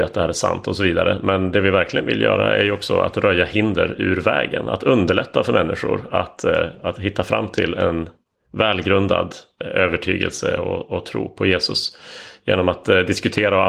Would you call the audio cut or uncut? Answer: uncut